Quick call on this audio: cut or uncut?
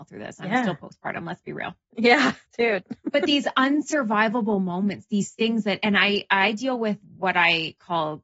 cut